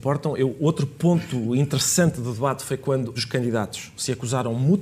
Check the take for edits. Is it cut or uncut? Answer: cut